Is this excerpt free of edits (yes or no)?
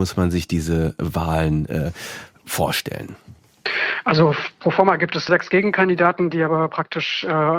no